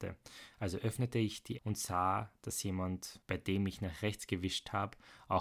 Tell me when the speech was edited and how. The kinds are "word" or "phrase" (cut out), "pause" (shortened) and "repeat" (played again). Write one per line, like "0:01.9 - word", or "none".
0:01.6 - word